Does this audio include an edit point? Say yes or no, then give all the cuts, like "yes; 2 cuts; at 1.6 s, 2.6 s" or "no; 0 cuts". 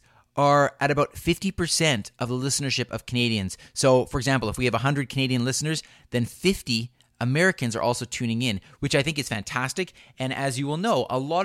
no; 0 cuts